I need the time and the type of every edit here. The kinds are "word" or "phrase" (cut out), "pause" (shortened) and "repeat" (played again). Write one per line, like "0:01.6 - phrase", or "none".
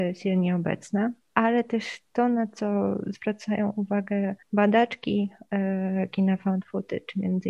0:04.4 - pause

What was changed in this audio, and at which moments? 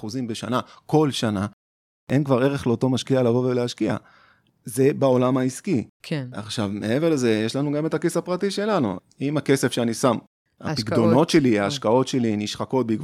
none

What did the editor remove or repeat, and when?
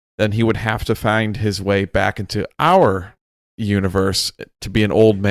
none

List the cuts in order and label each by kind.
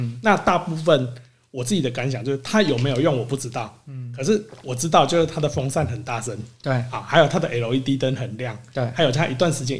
none

